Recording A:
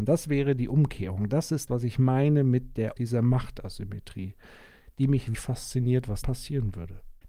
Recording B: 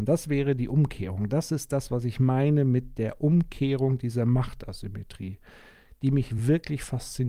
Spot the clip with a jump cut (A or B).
A